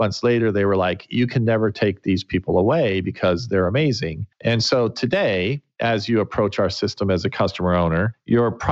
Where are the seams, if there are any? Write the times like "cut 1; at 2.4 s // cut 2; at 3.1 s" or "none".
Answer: none